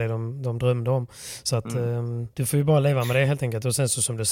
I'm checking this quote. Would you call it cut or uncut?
cut